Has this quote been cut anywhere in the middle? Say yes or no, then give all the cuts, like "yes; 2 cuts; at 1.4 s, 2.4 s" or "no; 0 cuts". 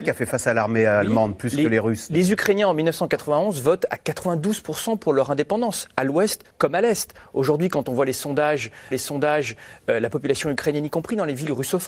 yes; 2 cuts; at 6.5 s, 8.9 s